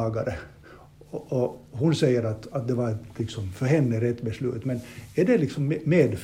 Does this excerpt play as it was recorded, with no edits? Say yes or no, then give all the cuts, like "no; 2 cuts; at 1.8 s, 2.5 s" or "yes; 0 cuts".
yes; 0 cuts